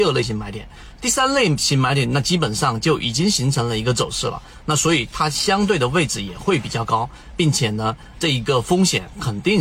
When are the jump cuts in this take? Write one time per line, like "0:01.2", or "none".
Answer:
0:08.1